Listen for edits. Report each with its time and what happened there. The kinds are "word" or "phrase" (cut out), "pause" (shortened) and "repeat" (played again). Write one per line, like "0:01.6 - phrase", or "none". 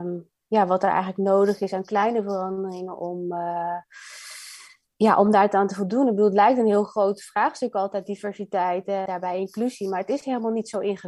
0:09.1 - word